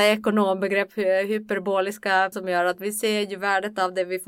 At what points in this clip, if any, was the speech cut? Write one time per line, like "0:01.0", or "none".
0:02.3